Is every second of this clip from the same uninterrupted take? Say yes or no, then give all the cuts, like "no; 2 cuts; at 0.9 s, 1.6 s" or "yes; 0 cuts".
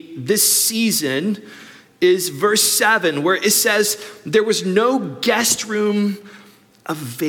yes; 0 cuts